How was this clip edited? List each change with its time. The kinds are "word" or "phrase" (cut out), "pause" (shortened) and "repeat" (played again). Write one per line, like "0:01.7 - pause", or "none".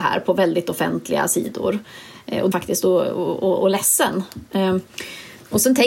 0:02.5 - phrase